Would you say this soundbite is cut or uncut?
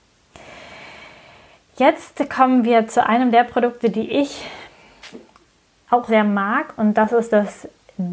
cut